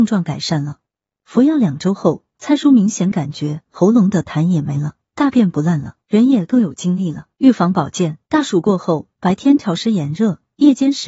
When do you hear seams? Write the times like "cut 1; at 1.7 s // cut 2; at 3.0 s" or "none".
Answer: cut 1; at 6.0 s // cut 2; at 7.3 s // cut 3; at 8.2 s